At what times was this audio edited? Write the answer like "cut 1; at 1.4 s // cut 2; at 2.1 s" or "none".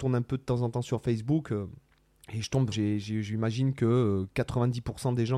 cut 1; at 2.0 s // cut 2; at 2.7 s